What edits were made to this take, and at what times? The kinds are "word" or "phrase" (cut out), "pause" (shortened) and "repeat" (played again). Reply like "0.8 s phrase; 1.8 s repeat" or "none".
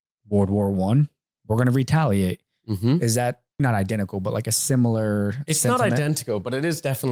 3.6 s word